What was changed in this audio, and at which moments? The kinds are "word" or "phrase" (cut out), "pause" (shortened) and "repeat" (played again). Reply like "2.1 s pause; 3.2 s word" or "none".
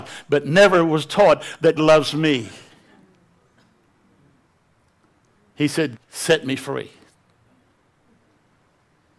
1.8 s word; 6.0 s word